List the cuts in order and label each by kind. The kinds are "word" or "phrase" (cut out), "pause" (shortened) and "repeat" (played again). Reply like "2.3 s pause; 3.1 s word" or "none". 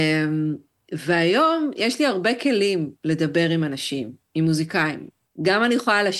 3.0 s pause; 4.2 s pause; 5.3 s pause